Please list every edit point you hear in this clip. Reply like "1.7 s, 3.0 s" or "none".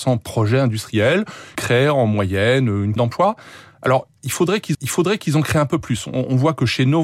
1.6 s, 3.0 s, 4.7 s